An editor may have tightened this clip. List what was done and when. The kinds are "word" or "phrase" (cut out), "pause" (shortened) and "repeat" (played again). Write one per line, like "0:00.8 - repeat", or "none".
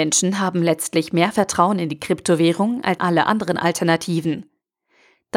0:03.0 - word